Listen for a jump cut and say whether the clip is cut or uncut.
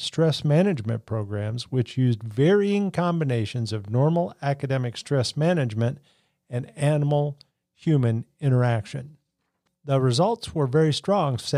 uncut